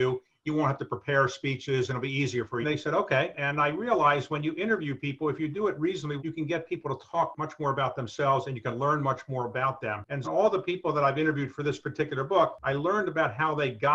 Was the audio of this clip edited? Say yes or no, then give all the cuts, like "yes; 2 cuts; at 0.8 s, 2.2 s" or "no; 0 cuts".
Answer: yes; 3 cuts; at 2.6 s, 6.2 s, 10.2 s